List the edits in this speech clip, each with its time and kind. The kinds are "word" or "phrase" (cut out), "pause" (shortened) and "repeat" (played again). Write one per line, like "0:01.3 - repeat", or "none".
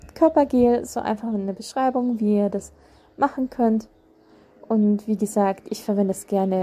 none